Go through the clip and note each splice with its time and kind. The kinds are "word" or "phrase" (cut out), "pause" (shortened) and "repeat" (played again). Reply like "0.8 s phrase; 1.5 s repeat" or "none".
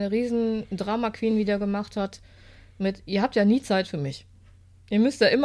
none